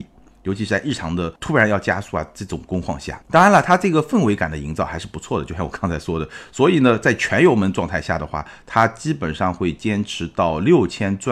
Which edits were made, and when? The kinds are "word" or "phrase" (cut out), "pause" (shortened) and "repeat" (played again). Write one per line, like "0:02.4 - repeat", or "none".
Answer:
0:01.4 - pause
0:03.2 - pause